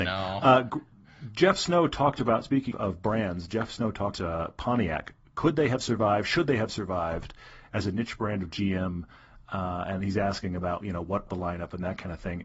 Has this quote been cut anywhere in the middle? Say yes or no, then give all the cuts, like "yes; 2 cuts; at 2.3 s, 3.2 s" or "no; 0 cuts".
yes; 3 cuts; at 2.7 s, 4.1 s, 11.3 s